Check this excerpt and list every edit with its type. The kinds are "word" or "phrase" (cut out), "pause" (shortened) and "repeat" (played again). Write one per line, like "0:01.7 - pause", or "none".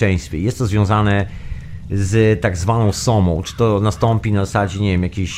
none